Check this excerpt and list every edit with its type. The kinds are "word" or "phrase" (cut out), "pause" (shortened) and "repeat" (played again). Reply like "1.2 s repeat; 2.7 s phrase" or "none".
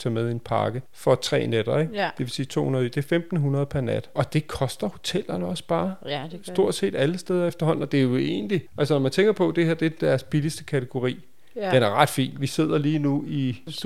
none